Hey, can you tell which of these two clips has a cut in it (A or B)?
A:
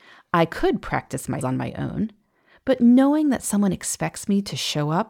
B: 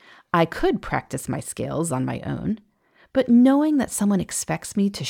A